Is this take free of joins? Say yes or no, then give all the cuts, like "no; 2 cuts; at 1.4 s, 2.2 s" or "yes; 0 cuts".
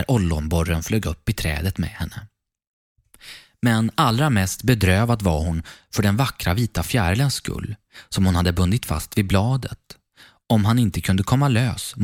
yes; 0 cuts